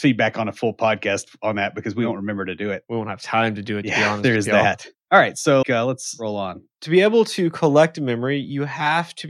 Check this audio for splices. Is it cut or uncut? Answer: cut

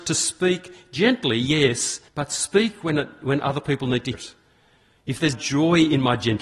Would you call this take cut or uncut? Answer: cut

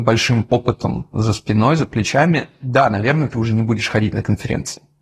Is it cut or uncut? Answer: uncut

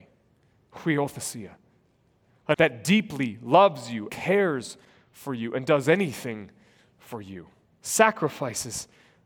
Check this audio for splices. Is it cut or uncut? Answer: cut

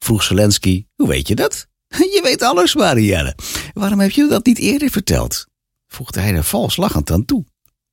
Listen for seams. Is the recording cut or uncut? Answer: cut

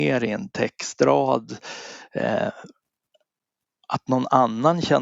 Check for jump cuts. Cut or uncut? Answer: uncut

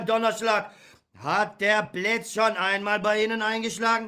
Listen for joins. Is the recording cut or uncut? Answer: uncut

